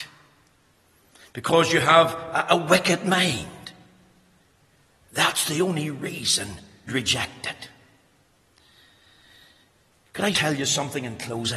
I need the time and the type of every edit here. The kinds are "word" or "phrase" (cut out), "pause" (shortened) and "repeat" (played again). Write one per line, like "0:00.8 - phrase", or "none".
0:06.9 - word
0:10.3 - word